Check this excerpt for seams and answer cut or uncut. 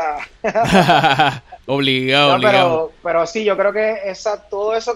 uncut